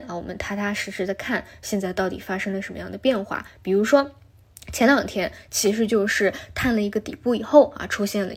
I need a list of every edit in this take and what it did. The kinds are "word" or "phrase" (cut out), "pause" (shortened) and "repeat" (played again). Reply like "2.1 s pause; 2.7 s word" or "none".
none